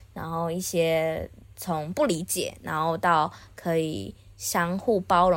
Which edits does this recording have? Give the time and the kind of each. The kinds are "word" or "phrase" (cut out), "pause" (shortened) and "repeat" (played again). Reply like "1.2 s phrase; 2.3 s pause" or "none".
none